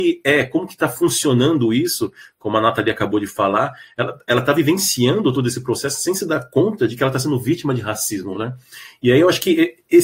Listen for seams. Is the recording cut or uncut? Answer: uncut